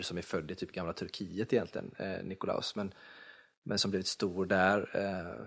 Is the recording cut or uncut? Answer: uncut